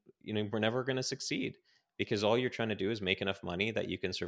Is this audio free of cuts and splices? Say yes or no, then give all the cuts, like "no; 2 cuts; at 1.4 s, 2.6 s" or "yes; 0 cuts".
yes; 0 cuts